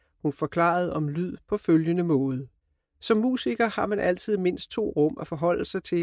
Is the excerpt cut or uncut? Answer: cut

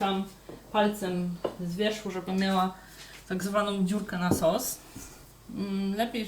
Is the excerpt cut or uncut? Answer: uncut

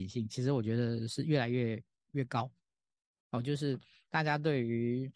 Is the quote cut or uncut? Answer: uncut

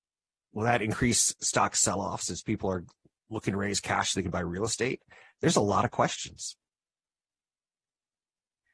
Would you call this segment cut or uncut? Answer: uncut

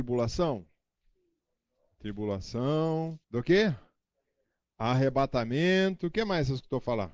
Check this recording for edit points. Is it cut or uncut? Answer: cut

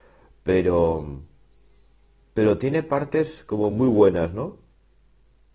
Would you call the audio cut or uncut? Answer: uncut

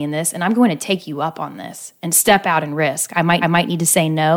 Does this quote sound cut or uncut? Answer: cut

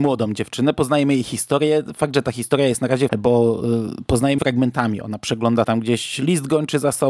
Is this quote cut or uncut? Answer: cut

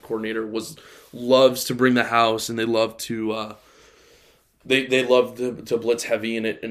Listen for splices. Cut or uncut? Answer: uncut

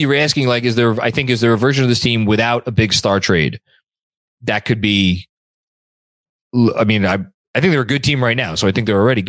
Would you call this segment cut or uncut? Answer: uncut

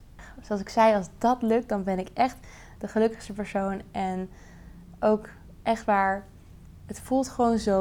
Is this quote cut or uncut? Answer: uncut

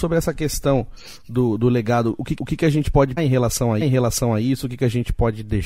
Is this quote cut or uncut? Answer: cut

